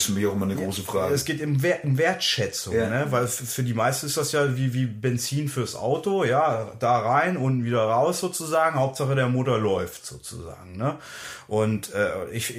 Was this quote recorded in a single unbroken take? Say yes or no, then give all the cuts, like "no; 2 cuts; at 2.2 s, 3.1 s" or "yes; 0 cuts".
yes; 0 cuts